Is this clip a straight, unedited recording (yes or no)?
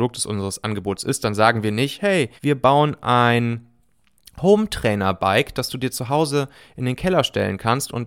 no